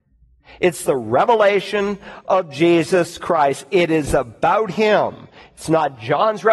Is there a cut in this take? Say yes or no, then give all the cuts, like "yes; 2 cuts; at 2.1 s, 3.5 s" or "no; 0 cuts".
no; 0 cuts